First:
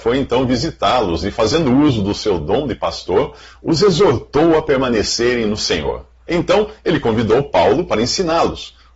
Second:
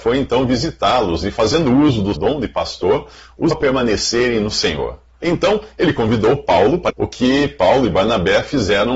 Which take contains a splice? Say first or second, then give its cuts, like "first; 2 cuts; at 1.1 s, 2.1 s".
second; 3 cuts; at 2.1 s, 3.5 s, 6.9 s